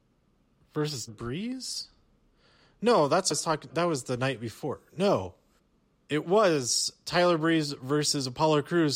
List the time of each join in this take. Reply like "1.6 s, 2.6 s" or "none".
1.1 s, 3.3 s, 3.7 s, 5.6 s